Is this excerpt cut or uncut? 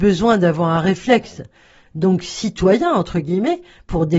uncut